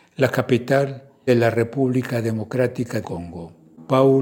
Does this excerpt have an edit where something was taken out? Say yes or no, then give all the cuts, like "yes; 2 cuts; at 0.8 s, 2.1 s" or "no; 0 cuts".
yes; 2 cuts; at 1.3 s, 3.0 s